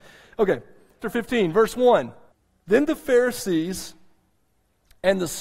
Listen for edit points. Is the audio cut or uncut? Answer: cut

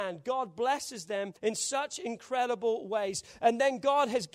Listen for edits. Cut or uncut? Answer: cut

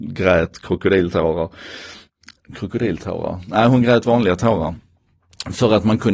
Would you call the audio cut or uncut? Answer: uncut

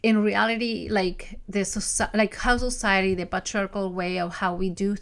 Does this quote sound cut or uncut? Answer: uncut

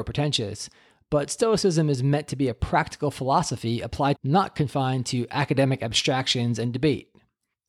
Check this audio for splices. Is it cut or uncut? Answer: cut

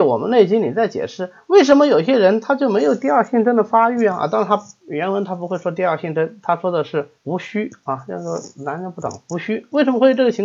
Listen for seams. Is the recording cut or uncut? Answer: cut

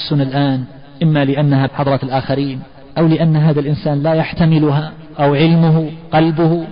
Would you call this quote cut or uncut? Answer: cut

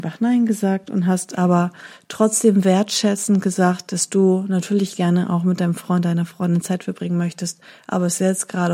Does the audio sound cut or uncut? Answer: uncut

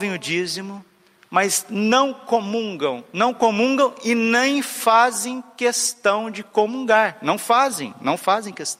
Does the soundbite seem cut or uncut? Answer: uncut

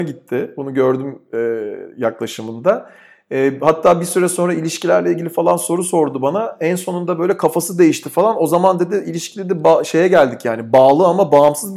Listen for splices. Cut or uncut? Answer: uncut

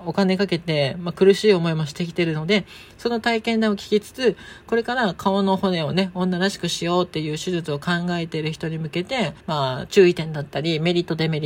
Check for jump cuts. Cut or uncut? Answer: cut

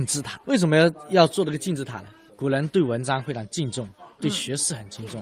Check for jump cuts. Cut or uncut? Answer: uncut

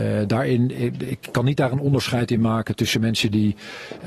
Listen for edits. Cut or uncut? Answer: uncut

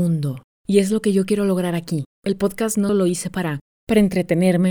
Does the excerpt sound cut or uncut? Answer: uncut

